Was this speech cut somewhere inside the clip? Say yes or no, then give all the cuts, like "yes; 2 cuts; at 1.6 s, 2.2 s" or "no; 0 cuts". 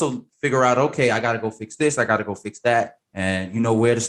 yes; 1 cut; at 3.0 s